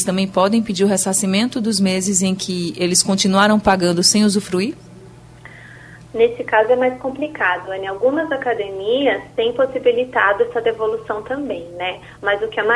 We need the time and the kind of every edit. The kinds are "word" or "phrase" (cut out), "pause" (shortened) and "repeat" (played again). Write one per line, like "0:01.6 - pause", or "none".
none

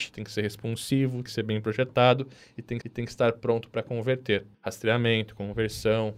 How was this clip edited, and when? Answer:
0:01.3 - word
0:02.8 - repeat
0:04.5 - pause

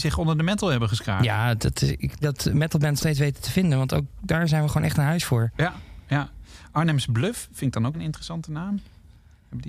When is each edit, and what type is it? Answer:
0:02.2 - phrase
0:03.0 - phrase
0:07.9 - word

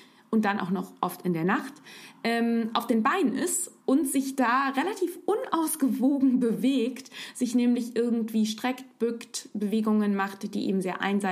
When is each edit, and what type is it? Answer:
0:03.8 - pause

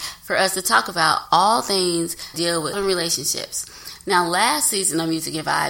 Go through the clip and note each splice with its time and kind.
0:02.3 - word
0:02.7 - word

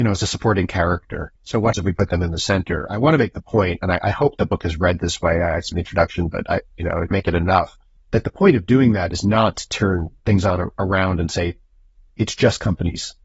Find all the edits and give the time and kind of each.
0:01.4 - pause
0:01.7 - word
0:05.7 - phrase
0:07.1 - word
0:08.0 - pause
0:10.2 - pause

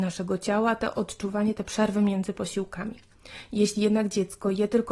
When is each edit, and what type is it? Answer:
none

